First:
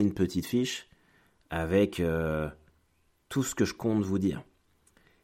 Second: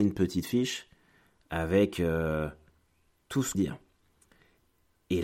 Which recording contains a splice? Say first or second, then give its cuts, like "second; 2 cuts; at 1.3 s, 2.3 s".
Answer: second; 1 cut; at 3.5 s